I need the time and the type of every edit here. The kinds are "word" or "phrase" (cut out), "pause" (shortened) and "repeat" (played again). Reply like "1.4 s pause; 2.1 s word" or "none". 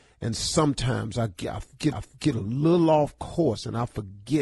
1.9 s repeat